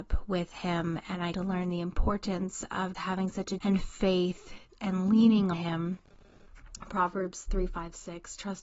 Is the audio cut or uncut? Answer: cut